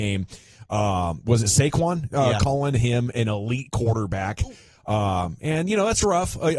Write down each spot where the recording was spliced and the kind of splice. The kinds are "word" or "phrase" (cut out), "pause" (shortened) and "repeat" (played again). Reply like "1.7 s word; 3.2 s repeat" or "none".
none

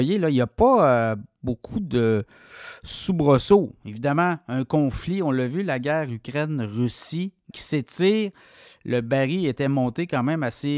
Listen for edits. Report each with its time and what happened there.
7.5 s word

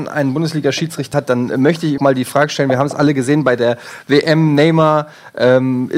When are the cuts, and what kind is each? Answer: 1.1 s word; 2.0 s word

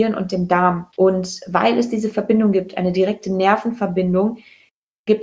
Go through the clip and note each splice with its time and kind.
0.9 s pause

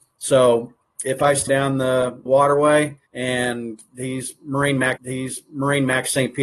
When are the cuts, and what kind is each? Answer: 1.5 s phrase; 2.3 s word; 3.1 s pause; 5.0 s repeat

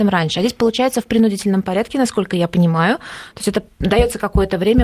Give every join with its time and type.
none

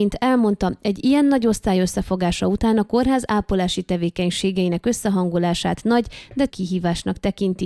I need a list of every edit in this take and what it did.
6.5 s word

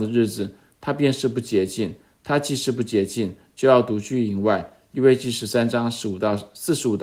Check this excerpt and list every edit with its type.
none

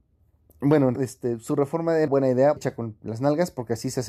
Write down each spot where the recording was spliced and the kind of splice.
0.9 s word; 2.1 s word; 2.6 s word

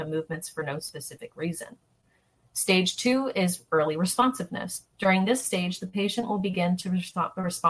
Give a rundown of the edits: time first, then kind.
none

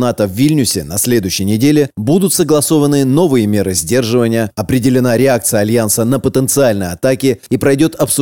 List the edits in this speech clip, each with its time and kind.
none

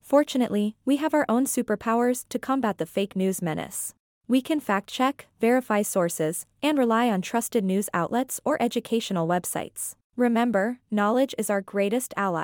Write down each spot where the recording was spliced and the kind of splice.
4.0 s pause; 10.0 s pause

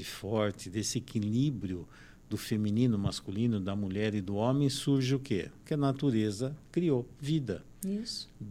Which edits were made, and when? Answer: 6.7 s pause

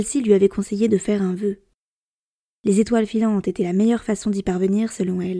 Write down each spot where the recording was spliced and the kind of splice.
none

